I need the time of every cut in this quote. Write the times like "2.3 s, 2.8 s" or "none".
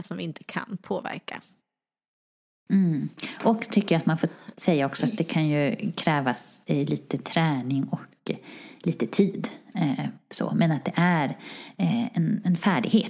none